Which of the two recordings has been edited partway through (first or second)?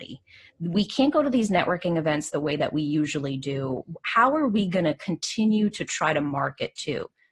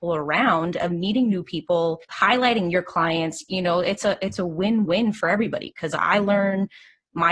second